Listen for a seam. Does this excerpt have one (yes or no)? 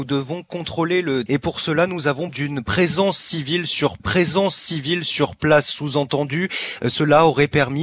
yes